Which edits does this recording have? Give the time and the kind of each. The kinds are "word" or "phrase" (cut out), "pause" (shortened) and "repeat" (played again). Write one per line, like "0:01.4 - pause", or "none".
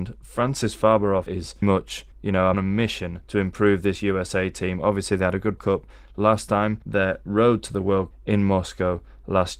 0:01.3 - word
0:01.6 - word
0:02.1 - pause
0:02.5 - phrase
0:03.2 - pause
0:05.6 - phrase
0:06.8 - pause
0:08.1 - word

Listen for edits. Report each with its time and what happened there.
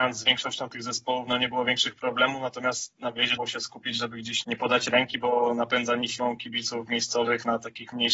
0:03.4 - word
0:04.4 - word

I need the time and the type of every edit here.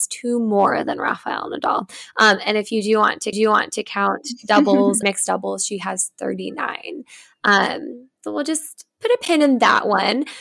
0:03.3 - repeat
0:05.0 - word
0:08.3 - word

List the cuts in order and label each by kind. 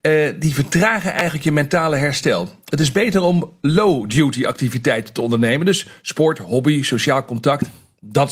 none

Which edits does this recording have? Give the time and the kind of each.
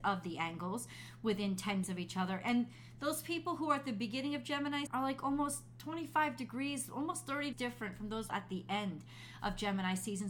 0:01.8 - word
0:04.9 - word
0:07.5 - word
0:08.3 - word

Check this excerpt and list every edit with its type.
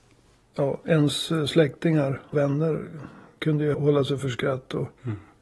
0:02.3 - word
0:03.7 - word

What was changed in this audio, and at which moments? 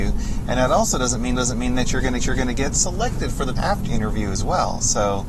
0:01.3 - repeat
0:02.2 - repeat
0:03.5 - word
0:03.9 - word

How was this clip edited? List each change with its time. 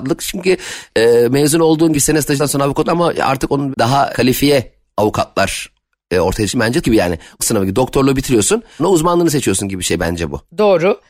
0:01.9 - word
0:02.4 - word
0:02.8 - word
0:03.7 - word
0:04.1 - word
0:06.5 - word
0:06.8 - word
0:07.4 - word
0:08.8 - word

